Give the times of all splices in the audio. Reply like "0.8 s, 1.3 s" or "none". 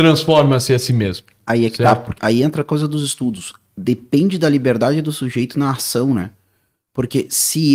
2.2 s